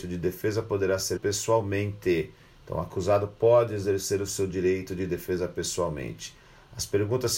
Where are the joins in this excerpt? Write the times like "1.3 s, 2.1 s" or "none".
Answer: 1.2 s